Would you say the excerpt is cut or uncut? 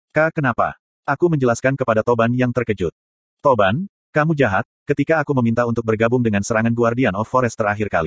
uncut